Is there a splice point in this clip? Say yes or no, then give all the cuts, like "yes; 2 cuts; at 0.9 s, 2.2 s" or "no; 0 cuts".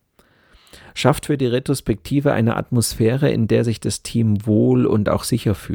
no; 0 cuts